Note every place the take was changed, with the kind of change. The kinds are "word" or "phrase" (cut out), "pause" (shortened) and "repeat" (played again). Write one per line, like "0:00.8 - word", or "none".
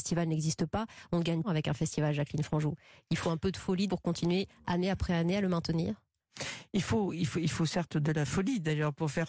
0:01.4 - phrase
0:03.9 - word